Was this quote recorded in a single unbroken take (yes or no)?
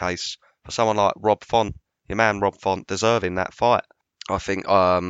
yes